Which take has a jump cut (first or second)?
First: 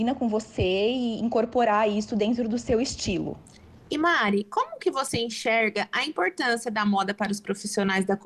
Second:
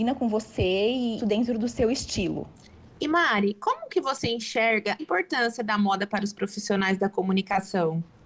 second